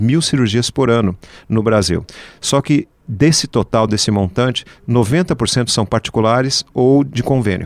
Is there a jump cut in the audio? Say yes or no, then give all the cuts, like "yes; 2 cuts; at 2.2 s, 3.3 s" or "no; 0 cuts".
no; 0 cuts